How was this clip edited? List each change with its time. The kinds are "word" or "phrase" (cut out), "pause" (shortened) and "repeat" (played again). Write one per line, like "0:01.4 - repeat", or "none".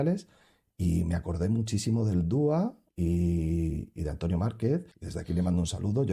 0:02.9 - pause
0:04.9 - pause